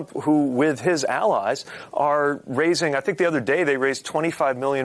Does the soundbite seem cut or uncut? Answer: uncut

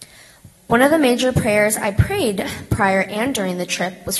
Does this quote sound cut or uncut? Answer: uncut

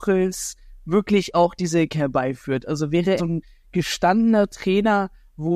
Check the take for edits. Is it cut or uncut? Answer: cut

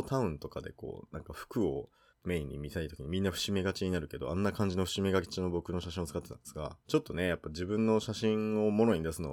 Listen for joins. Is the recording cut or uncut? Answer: cut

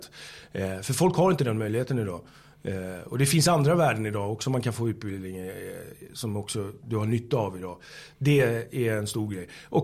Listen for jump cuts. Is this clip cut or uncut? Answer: uncut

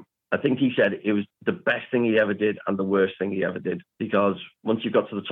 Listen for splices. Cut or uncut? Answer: uncut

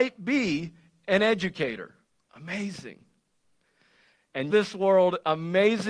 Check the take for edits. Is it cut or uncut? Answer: cut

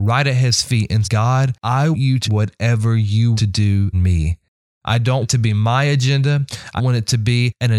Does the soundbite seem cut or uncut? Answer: cut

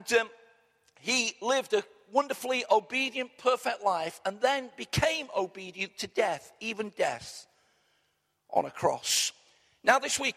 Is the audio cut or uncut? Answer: uncut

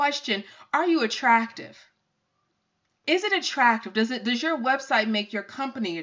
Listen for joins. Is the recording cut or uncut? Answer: uncut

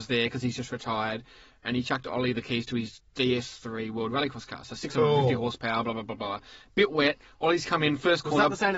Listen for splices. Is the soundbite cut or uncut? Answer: uncut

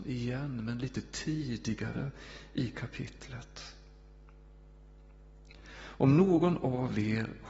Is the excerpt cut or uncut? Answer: uncut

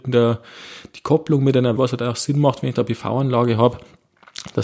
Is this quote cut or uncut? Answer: cut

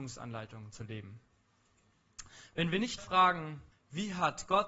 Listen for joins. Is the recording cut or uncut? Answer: cut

